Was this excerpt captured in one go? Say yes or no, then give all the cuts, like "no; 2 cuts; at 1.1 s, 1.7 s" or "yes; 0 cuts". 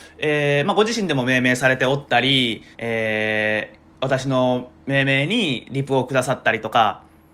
no; 2 cuts; at 2.7 s, 3.9 s